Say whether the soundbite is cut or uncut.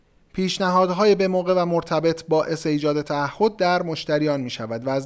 uncut